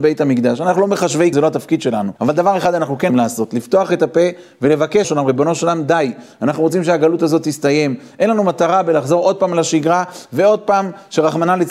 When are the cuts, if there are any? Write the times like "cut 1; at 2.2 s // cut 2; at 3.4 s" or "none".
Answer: cut 1; at 1.3 s // cut 2; at 2.2 s // cut 3; at 3.1 s // cut 4; at 5.0 s